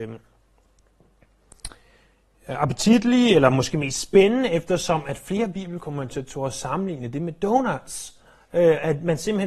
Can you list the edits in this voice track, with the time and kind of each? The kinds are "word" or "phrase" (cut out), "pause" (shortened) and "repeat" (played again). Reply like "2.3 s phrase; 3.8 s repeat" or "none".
none